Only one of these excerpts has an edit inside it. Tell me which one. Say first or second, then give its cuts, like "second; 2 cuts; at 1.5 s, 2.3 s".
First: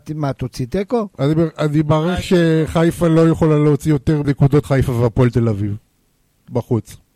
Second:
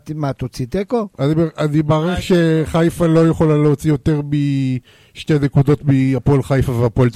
first; 2 cuts; at 4.2 s, 4.6 s